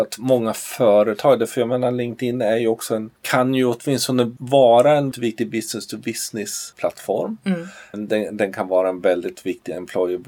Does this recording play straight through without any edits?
no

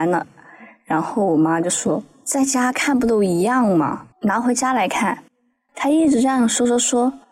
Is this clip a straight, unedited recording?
no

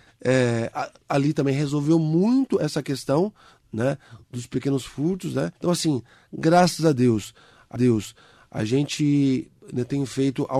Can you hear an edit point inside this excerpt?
yes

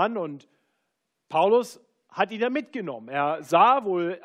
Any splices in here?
no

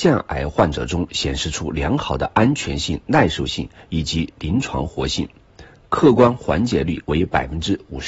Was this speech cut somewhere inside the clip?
no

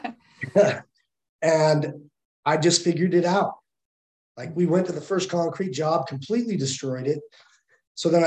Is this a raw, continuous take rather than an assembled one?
yes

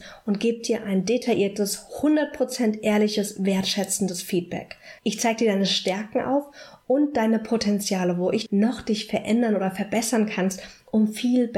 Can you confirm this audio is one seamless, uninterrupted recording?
no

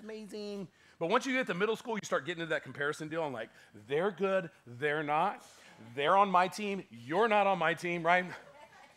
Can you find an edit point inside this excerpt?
no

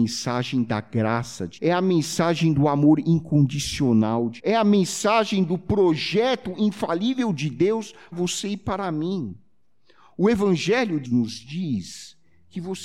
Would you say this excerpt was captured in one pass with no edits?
no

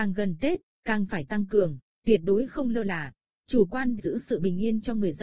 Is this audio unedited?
no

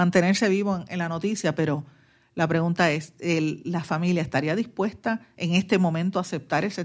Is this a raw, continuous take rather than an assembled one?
yes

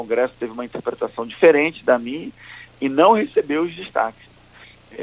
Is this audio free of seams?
yes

